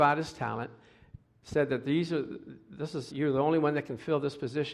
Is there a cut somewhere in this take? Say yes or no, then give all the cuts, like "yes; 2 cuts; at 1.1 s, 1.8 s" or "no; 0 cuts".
yes; 1 cut; at 3.1 s